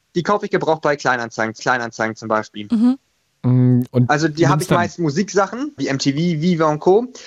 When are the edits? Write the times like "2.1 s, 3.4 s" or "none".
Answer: 1.6 s, 5.8 s